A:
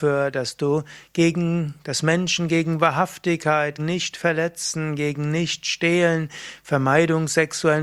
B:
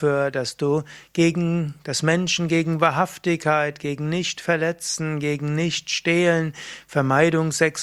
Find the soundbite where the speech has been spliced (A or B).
A